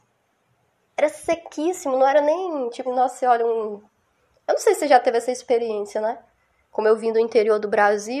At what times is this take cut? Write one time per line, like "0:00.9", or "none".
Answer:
0:02.9